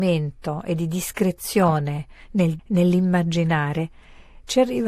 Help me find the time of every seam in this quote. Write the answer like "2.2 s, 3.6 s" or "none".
2.6 s